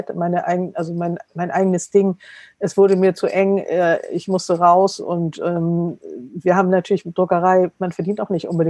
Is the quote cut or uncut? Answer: uncut